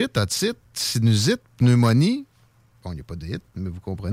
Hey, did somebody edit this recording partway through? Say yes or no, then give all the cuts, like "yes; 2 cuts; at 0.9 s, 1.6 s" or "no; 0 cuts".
no; 0 cuts